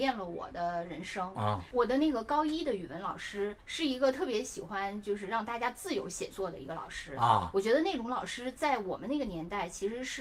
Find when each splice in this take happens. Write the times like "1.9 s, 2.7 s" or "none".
3.6 s